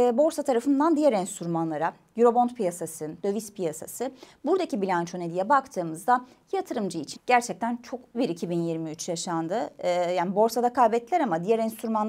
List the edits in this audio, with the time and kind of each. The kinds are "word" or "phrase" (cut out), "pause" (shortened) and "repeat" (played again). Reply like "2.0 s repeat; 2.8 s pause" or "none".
3.2 s word; 7.1 s word; 8.1 s word